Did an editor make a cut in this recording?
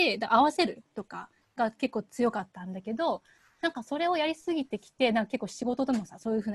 no; 0 cuts

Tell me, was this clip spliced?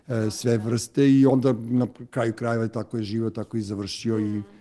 no; 0 cuts

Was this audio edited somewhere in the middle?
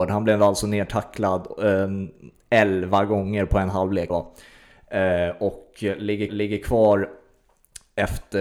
yes; 2 cuts; at 4.1 s, 6.3 s

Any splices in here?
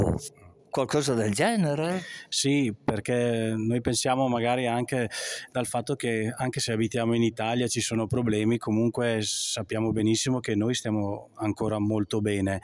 no; 0 cuts

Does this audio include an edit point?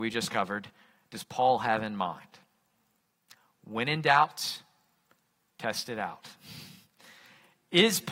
no; 0 cuts

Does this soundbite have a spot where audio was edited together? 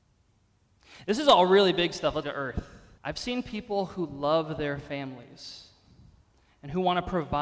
yes; 2 cuts; at 2.2 s, 3.0 s

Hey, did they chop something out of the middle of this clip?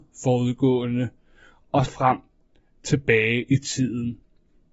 yes; 1 cut; at 1.9 s

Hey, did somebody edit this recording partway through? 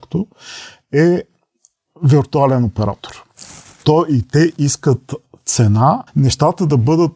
yes; 1 cut; at 6.1 s

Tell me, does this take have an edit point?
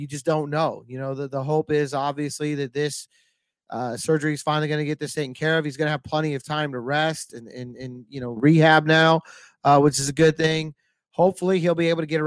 no; 0 cuts

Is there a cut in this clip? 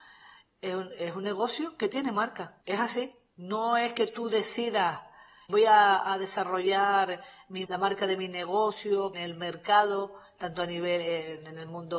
yes; 4 cuts; at 2.6 s, 5.5 s, 7.7 s, 9.1 s

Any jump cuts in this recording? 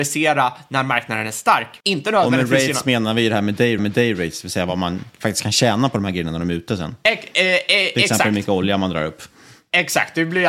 yes; 2 cuts; at 1.8 s, 3.8 s

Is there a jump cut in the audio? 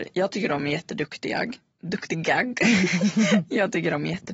no; 0 cuts

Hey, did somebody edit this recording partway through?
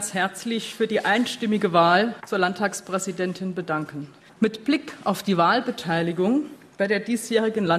no; 0 cuts

